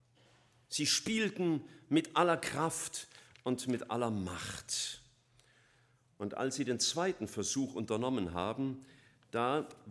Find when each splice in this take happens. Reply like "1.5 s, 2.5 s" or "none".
none